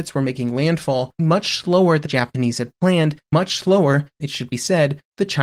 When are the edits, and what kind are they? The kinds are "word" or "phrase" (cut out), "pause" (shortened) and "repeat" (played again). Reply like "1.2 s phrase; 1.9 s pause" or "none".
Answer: 1.2 s word; 2.1 s word; 3.3 s word; 4.2 s word